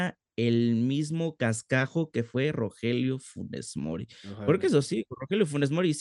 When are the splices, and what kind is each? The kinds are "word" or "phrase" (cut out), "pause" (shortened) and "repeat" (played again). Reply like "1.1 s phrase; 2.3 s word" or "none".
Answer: none